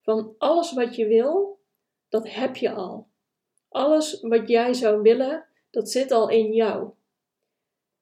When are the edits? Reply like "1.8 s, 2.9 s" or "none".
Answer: none